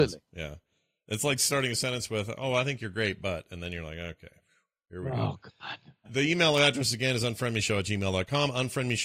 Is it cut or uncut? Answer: cut